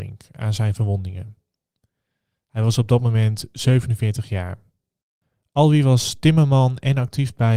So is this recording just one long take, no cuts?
yes; 0 cuts

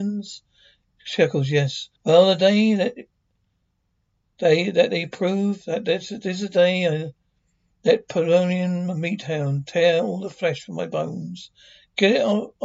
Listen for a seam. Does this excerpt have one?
yes; 1 cut; at 2.0 s

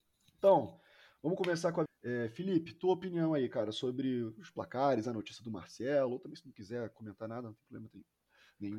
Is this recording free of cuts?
no; 1 cut; at 1.9 s

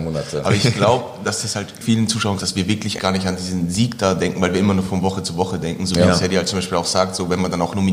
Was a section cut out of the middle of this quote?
yes; 3 cuts; at 1.8 s, 2.4 s, 3.0 s

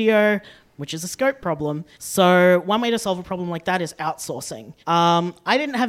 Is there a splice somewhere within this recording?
yes; 2 cuts; at 1.9 s, 4.8 s

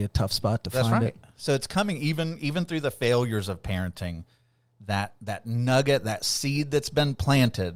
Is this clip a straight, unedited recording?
yes; 0 cuts

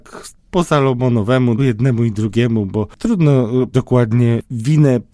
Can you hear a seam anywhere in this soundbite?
yes; 2 cuts; at 1.6 s, 3.7 s

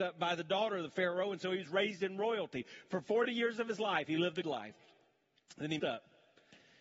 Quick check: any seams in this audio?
yes; 2 cuts; at 4.4 s, 5.8 s

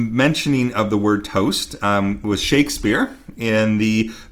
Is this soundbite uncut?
yes; 0 cuts

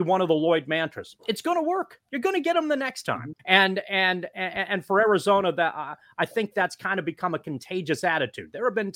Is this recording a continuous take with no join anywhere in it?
no; 3 cuts; at 1.2 s, 2.0 s, 3.4 s

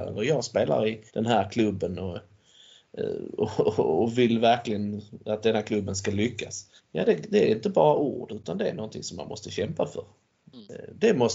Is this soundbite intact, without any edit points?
no; 2 cuts; at 1.1 s, 6.8 s

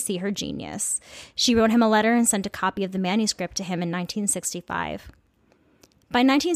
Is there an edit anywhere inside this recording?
no; 0 cuts

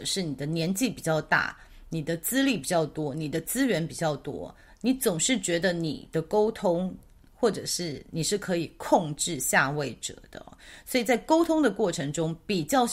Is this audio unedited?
yes; 0 cuts

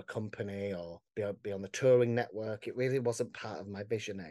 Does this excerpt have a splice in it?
yes; 1 cut; at 1.1 s

